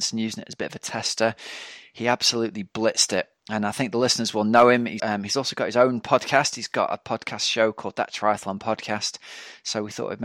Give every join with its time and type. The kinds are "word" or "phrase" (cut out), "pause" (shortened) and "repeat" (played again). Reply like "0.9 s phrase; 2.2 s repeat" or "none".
5.0 s word